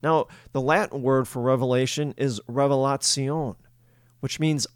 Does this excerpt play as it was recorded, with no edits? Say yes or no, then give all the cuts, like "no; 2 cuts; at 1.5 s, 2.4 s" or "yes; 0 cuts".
yes; 0 cuts